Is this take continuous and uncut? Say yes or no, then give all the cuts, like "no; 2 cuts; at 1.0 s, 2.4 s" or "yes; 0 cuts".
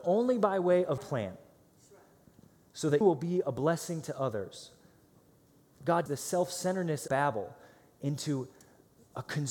no; 4 cuts; at 1.0 s, 3.0 s, 6.1 s, 7.1 s